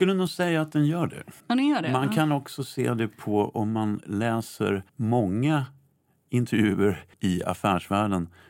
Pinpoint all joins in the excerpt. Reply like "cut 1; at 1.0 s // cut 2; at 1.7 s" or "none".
cut 1; at 1.4 s // cut 2; at 4.9 s // cut 3; at 7.1 s